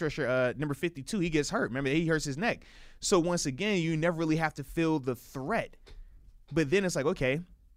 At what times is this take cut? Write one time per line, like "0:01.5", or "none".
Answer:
0:06.4